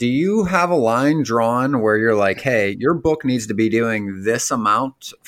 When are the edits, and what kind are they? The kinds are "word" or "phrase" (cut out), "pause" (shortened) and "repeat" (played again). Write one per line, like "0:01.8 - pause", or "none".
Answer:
none